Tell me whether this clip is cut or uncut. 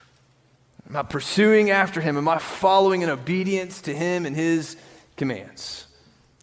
uncut